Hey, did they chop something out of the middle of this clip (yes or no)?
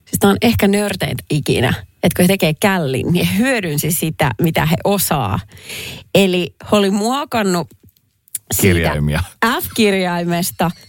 no